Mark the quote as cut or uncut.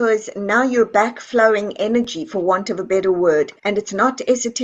cut